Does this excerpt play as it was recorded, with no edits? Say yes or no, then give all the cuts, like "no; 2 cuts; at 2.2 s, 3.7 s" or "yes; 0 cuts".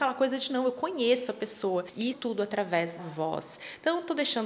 no; 2 cuts; at 2.1 s, 3.0 s